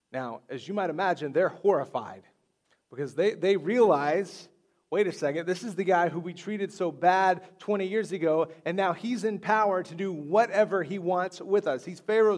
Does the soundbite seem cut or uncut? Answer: cut